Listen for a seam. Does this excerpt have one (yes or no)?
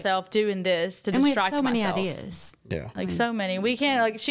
no